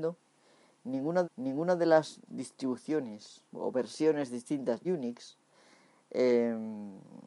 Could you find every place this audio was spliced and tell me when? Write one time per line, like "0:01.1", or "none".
0:01.2
0:02.3
0:03.4
0:04.8